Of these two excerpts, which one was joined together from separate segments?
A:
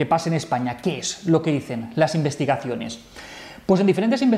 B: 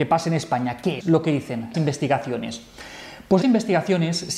B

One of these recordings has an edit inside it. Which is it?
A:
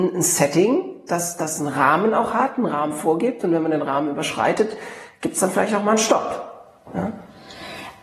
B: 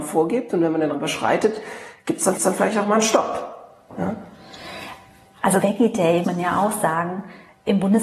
B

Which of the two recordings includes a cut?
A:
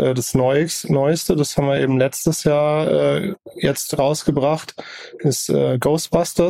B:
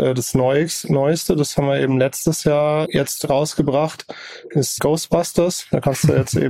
B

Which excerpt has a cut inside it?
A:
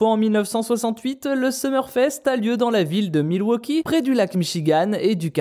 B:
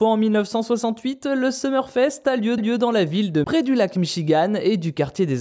B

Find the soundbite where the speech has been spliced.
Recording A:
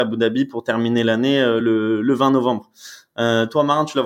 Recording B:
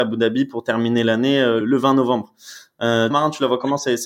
B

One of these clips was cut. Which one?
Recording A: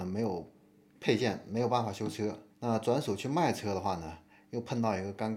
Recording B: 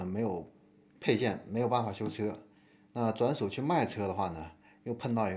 A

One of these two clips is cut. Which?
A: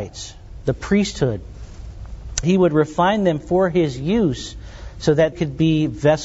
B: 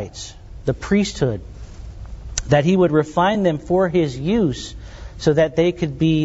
A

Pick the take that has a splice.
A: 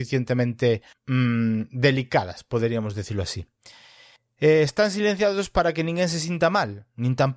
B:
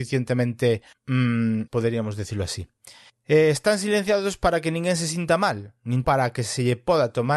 B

